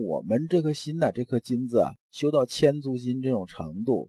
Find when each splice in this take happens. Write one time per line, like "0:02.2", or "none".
0:02.0

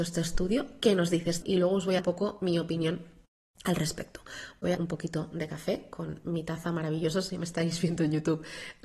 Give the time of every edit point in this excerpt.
0:01.4
0:02.0
0:04.7

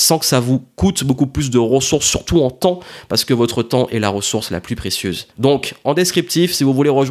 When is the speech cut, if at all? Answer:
0:05.3

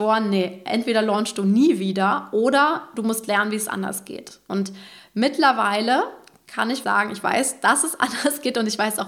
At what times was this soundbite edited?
0:06.8

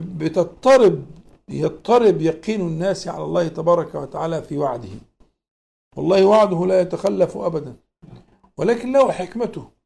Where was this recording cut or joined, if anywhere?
none

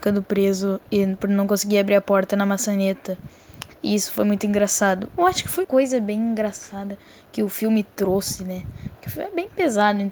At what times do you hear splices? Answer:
0:05.6

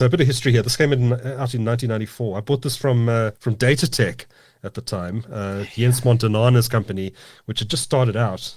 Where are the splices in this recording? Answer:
0:03.4

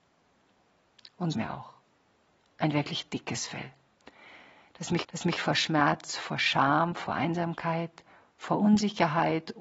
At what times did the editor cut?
0:01.3
0:05.0

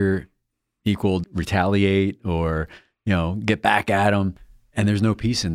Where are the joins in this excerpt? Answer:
0:01.2

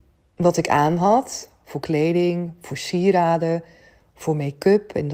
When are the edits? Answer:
none

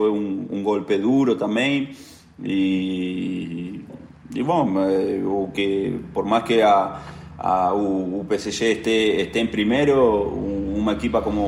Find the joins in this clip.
none

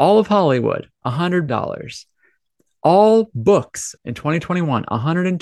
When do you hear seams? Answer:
0:01.5
0:04.0

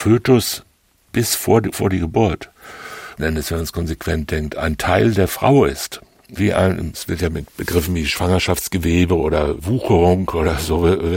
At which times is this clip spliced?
0:01.7
0:03.2
0:06.4

